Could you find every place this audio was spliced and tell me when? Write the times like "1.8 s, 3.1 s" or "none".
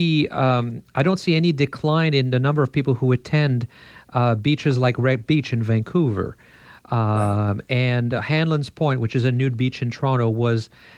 none